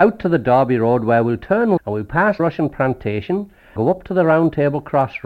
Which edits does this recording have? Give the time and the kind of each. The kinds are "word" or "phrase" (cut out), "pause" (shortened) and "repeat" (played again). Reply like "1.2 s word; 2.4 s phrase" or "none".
1.8 s word; 2.4 s word; 3.8 s word